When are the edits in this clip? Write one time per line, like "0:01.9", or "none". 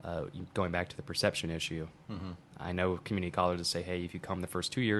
none